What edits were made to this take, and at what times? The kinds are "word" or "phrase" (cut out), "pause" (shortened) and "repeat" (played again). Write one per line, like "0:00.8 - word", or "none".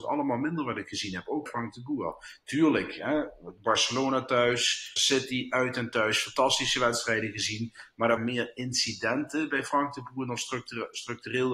0:01.5 - word
0:05.0 - word
0:08.2 - word